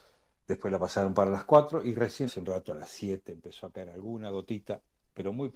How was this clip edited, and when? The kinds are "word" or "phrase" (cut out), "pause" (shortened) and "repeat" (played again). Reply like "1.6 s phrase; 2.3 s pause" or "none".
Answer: 2.3 s word